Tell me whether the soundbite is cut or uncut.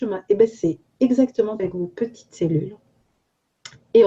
cut